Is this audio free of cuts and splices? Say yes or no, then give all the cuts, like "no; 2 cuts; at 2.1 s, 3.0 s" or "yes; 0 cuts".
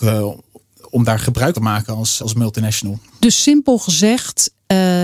no; 3 cuts; at 1.5 s, 2.2 s, 3.1 s